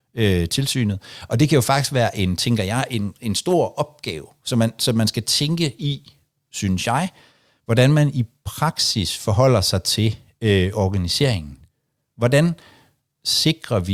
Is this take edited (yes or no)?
no